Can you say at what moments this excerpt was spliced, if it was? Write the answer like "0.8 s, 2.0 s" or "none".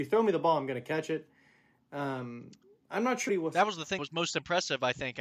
3.3 s, 4.0 s